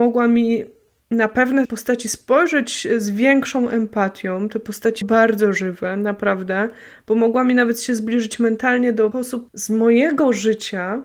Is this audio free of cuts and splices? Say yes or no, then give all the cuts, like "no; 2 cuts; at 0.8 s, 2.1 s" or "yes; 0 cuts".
no; 3 cuts; at 1.6 s, 5.0 s, 9.1 s